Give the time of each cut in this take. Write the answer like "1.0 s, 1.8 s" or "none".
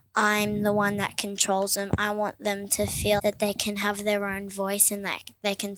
3.2 s